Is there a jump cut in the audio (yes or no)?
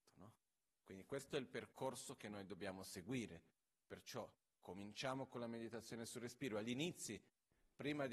no